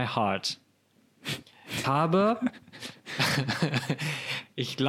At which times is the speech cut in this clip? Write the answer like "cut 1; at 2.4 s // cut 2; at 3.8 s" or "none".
cut 1; at 1.8 s